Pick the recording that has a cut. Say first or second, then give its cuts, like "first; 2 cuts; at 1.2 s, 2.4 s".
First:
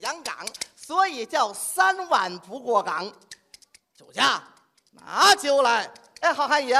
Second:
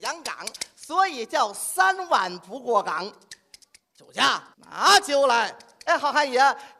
second; 1 cut; at 4.5 s